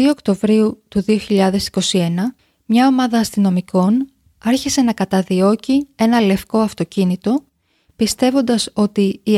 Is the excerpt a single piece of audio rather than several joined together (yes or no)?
yes